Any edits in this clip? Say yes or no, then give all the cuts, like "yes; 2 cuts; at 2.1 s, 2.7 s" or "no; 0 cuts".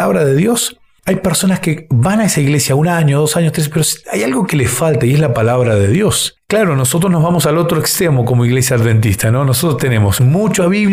no; 0 cuts